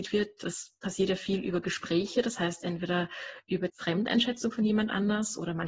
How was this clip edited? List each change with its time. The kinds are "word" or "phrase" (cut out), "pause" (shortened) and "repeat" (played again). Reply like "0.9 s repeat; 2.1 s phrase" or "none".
3.7 s word

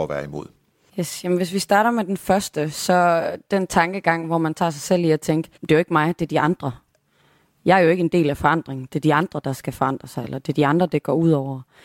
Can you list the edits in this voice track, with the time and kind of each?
5.6 s pause

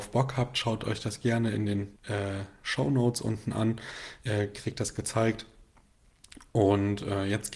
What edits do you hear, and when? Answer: 2.0 s pause

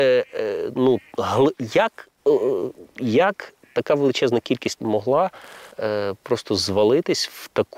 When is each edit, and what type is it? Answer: 3.6 s pause; 4.8 s word; 5.7 s pause

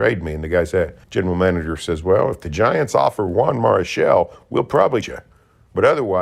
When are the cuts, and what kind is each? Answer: 1.0 s pause; 5.0 s word

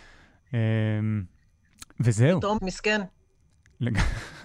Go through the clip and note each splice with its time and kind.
1.9 s pause; 2.5 s word

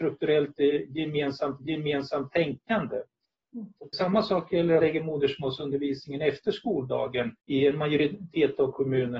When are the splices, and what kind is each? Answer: 1.6 s repeat; 3.9 s word; 4.8 s phrase; 7.4 s pause

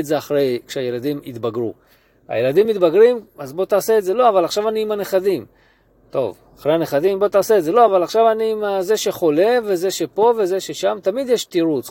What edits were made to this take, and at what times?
none

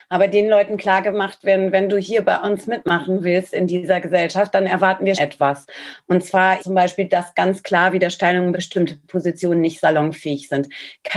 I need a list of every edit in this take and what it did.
5.1 s word; 6.6 s word; 8.5 s phrase

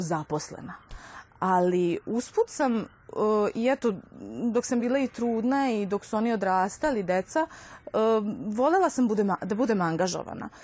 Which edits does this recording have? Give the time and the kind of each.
none

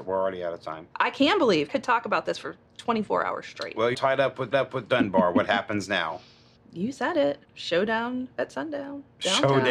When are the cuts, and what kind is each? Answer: 0.9 s pause; 1.7 s phrase; 2.7 s pause; 3.9 s word; 4.5 s repeat; 6.6 s pause; 7.4 s pause

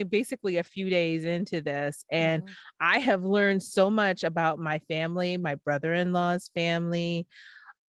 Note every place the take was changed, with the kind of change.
none

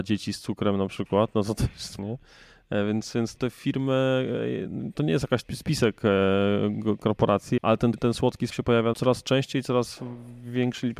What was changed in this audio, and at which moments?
2.0 s word; 3.4 s word; 5.4 s word; 7.0 s word; 7.6 s word; 7.9 s word; 8.5 s word; 8.9 s word

